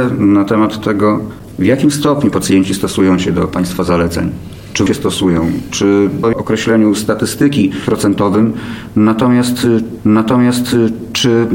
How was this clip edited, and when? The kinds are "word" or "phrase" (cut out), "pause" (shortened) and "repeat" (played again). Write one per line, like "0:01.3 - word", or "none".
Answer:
0:04.9 - word
0:06.2 - phrase
0:10.0 - repeat